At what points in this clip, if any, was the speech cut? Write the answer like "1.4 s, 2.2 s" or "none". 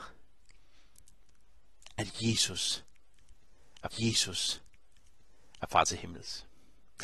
3.9 s